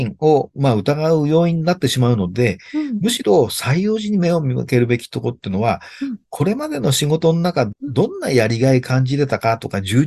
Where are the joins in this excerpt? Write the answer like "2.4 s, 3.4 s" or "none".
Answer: 7.7 s